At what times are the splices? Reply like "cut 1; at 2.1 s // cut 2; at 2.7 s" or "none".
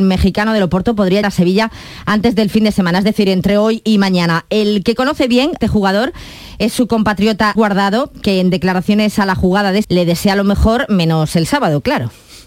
cut 1; at 1.2 s // cut 2; at 5.6 s // cut 3; at 7.6 s // cut 4; at 9.8 s